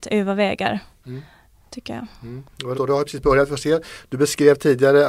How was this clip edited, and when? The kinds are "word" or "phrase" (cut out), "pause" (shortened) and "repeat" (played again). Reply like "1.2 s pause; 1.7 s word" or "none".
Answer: 2.7 s word